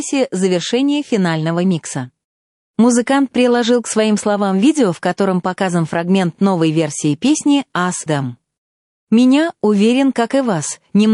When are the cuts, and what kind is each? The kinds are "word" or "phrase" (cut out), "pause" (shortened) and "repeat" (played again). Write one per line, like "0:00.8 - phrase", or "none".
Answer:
0:08.1 - word